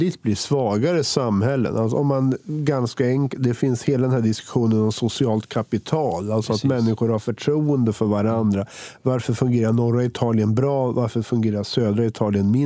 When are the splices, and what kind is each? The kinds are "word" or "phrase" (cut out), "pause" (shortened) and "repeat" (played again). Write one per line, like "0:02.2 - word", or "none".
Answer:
none